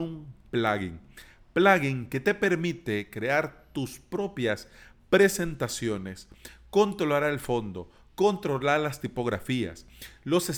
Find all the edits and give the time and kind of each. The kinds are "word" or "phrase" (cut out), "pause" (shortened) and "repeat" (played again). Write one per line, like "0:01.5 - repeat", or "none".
none